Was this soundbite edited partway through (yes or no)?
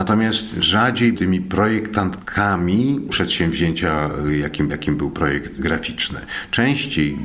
yes